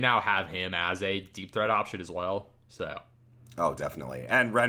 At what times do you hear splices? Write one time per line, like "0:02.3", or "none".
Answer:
none